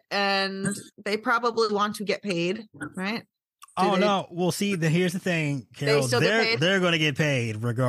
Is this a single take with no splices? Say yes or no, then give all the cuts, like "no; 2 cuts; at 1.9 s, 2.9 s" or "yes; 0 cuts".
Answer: no; 1 cut; at 0.9 s